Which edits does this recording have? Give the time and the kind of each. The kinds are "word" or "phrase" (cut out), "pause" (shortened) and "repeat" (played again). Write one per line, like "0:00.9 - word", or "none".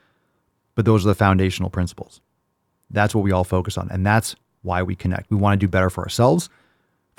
none